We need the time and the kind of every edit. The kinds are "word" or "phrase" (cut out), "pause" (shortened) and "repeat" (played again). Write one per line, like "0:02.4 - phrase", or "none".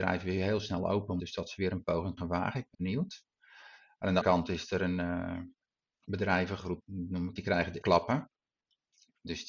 0:01.2 - word
0:02.2 - word
0:02.7 - word
0:04.2 - word
0:06.8 - word
0:07.4 - word
0:07.8 - word